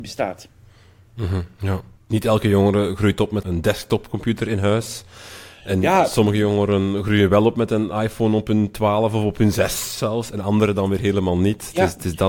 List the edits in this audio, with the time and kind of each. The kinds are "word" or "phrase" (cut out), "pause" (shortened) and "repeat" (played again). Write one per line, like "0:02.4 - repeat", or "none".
0:02.0 - pause
0:03.4 - word